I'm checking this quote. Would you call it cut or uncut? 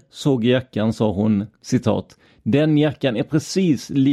uncut